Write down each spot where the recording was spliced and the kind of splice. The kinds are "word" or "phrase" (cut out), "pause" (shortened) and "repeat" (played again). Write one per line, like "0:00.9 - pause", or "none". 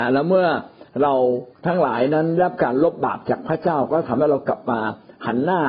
0:01.5 - pause

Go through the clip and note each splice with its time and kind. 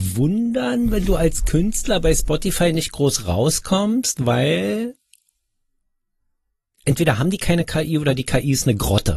none

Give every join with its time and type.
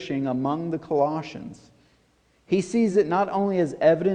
none

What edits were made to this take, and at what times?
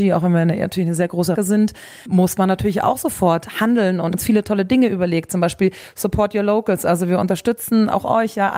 0:01.4 - word
0:02.1 - word
0:04.1 - word

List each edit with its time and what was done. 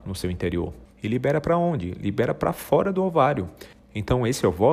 0:00.9 - pause

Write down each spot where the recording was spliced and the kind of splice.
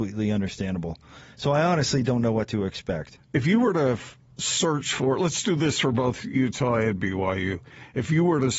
none

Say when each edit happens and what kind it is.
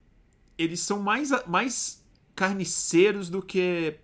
none

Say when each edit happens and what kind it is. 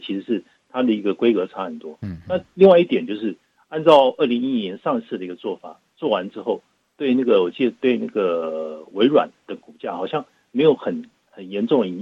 none

